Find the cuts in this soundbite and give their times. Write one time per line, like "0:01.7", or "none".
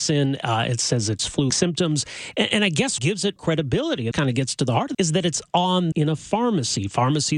0:01.2
0:01.5
0:03.0
0:03.4
0:04.1
0:04.9
0:05.9